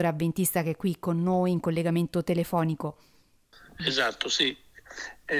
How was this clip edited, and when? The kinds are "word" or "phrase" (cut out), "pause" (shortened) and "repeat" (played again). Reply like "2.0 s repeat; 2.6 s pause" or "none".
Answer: none